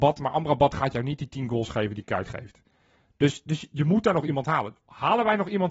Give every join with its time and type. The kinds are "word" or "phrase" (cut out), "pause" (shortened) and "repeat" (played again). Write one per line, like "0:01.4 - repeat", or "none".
none